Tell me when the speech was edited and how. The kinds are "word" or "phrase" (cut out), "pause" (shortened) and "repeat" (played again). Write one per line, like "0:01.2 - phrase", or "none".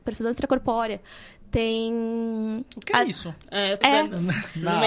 0:03.8 - word